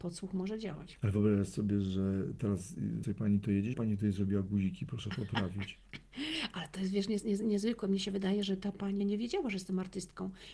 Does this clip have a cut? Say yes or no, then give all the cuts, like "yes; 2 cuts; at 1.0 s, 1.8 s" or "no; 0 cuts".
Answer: yes; 3 cuts; at 3.0 s, 3.7 s, 9.0 s